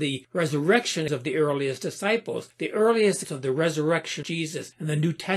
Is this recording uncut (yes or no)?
no